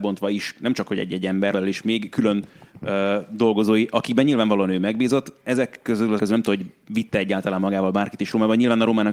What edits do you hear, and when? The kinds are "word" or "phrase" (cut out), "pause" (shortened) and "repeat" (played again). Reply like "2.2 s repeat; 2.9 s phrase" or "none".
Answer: 1.5 s phrase; 6.2 s word